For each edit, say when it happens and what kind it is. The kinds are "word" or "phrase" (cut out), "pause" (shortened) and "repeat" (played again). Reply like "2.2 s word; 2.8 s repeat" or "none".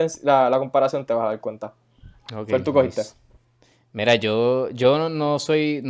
none